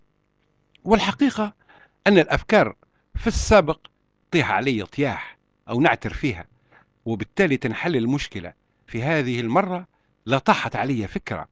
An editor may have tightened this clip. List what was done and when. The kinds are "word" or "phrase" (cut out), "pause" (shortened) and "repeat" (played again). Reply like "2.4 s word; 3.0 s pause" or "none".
4.2 s word; 8.9 s word